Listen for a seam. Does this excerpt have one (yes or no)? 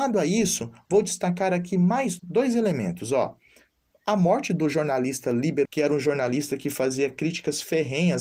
yes